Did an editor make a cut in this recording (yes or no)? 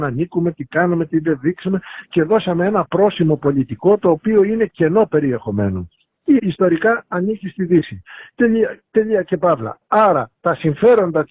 yes